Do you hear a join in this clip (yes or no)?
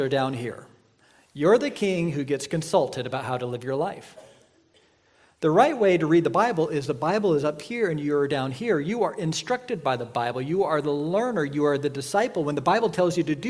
no